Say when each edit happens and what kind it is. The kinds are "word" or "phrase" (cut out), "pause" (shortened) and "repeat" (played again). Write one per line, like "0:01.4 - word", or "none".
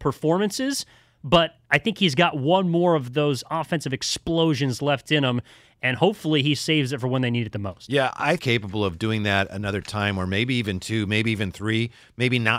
0:08.4 - phrase